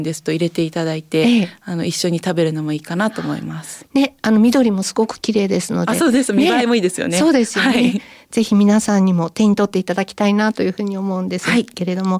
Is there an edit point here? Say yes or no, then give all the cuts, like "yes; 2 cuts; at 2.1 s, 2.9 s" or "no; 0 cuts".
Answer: no; 0 cuts